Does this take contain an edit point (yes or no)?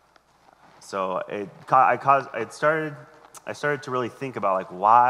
no